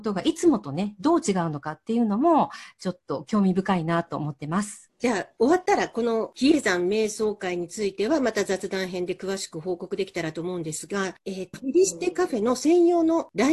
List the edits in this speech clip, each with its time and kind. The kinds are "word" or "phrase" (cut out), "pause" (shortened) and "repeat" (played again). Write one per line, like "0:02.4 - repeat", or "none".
0:11.5 - word